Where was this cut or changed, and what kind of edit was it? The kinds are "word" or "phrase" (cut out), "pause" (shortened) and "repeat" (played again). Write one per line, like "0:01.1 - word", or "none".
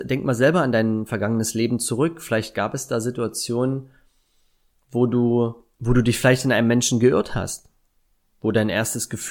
0:05.7 - pause

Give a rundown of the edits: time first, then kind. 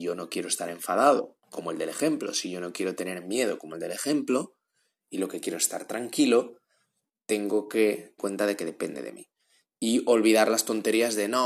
0:01.4 - pause
0:08.2 - word

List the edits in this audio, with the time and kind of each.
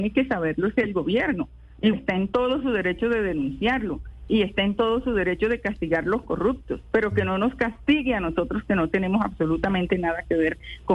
0:01.9 - word

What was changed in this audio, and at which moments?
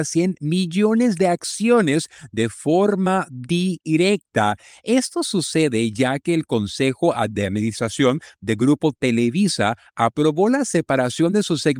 none

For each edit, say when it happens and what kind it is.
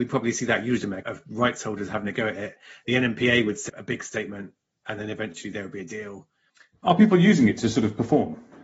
0:01.0 - word
0:03.7 - word

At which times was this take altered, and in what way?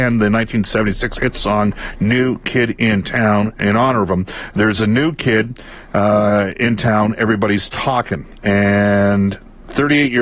none

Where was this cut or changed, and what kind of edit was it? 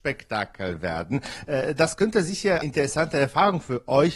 0:02.6 - word

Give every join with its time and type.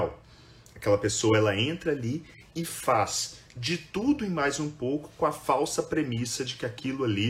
none

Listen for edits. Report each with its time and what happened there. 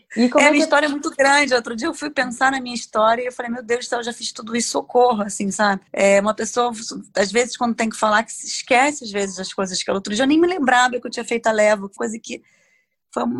0:05.9 - pause
0:12.0 - word

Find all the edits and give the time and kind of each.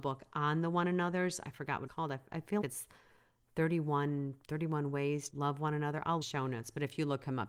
0:01.9 - word
0:02.6 - word
0:04.4 - pause
0:05.3 - word
0:06.2 - phrase

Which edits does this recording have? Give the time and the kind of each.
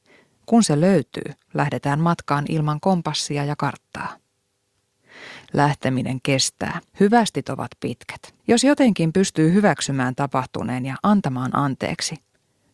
0:06.9 - pause
0:08.4 - pause

